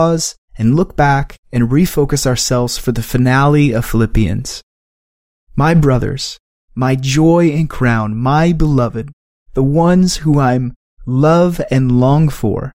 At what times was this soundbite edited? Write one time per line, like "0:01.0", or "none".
none